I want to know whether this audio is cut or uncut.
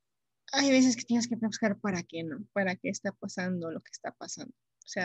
uncut